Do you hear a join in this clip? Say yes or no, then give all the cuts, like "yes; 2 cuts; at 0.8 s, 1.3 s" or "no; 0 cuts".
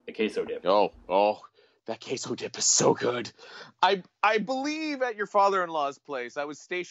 no; 0 cuts